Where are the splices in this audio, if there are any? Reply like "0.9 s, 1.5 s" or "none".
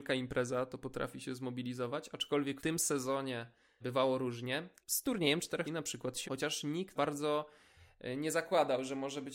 2.6 s, 3.8 s, 4.8 s, 5.6 s, 6.2 s, 7.0 s